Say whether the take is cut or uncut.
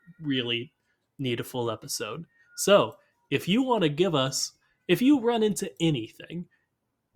uncut